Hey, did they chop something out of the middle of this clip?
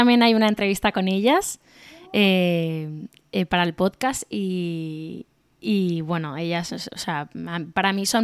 no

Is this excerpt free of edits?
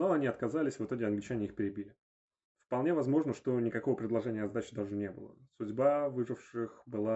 yes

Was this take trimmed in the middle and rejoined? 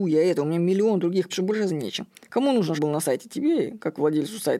yes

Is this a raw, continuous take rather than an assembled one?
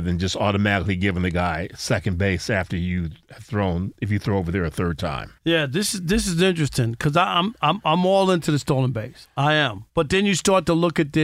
no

